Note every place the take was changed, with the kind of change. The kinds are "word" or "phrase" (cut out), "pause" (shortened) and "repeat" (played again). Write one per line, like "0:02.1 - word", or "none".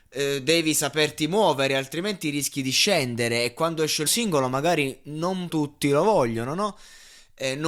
0:04.1 - word
0:05.5 - word